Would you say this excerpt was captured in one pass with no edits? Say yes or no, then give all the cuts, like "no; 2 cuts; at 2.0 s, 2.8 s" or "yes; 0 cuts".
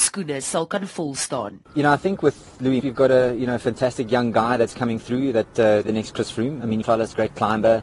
no; 4 cuts; at 1.6 s, 2.8 s, 5.8 s, 6.8 s